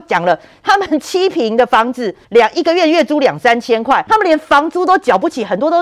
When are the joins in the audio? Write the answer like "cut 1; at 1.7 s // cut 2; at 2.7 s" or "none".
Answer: cut 1; at 2.2 s // cut 2; at 4.1 s